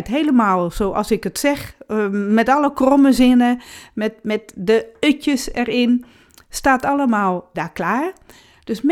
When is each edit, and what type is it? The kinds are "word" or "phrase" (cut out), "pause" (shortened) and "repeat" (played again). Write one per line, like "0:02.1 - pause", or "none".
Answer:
0:07.5 - word

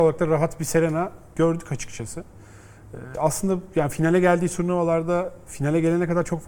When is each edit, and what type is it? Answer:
none

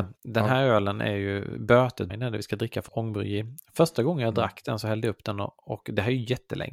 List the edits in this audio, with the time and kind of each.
0:02.1 - word
0:02.9 - word

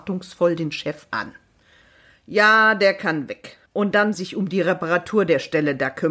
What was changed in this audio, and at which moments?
0:03.7 - pause
0:04.1 - phrase

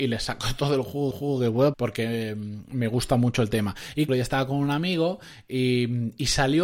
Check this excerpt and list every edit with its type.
0:01.1 - repeat
0:01.7 - word
0:04.1 - phrase

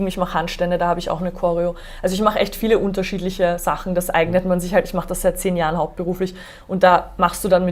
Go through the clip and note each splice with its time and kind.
none

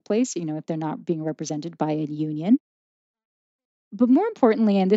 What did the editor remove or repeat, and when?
none

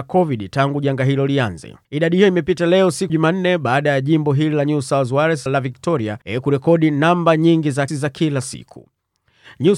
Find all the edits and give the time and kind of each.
0:01.8 - pause
0:03.1 - word
0:05.5 - word
0:06.2 - pause
0:07.9 - word

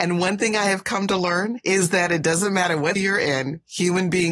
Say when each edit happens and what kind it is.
0:03.0 - word

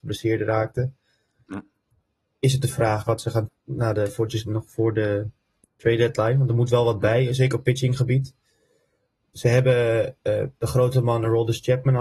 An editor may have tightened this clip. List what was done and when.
0:03.5 - phrase

